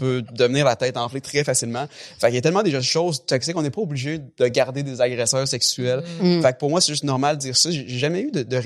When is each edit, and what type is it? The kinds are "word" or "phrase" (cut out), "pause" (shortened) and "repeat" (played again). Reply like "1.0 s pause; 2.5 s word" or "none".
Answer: none